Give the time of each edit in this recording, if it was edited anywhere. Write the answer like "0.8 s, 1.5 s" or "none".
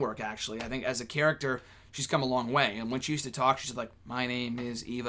none